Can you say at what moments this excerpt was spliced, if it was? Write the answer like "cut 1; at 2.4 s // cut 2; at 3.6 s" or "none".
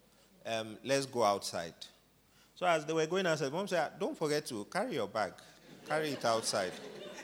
none